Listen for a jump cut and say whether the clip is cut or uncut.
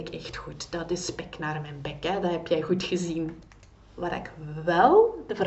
uncut